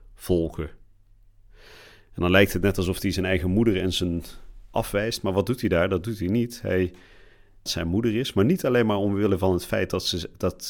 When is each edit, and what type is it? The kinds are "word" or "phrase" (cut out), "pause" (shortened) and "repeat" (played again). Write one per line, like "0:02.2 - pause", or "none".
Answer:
0:04.7 - word
0:07.7 - phrase